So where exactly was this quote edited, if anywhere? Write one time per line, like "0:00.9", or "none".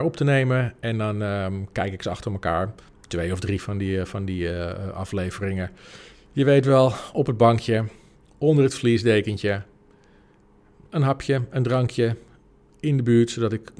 none